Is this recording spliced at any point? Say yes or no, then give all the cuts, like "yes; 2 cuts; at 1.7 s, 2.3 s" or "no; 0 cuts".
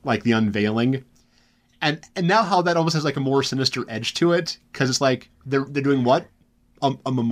no; 0 cuts